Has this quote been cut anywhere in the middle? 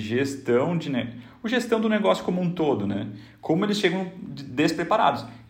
no; 0 cuts

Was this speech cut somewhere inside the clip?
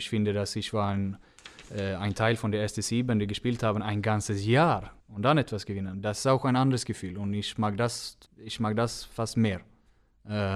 yes; 2 cuts; at 5.0 s, 8.3 s

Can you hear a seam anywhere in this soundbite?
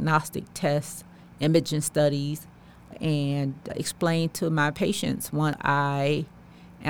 no; 0 cuts

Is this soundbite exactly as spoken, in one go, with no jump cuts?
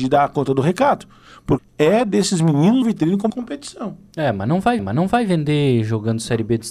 no; 4 cuts; at 1.6 s, 2.8 s, 3.3 s, 4.8 s

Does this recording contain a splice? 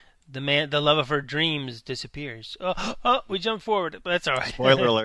no; 0 cuts

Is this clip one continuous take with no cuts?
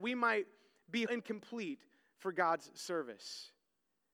no; 1 cut; at 1.1 s

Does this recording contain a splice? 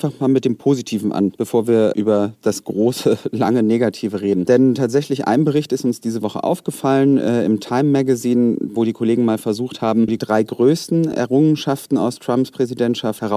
no; 0 cuts

